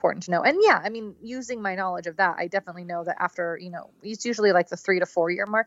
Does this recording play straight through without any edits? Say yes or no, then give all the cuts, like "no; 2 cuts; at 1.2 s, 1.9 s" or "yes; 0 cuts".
yes; 0 cuts